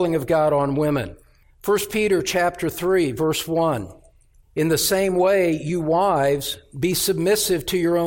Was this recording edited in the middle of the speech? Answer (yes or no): no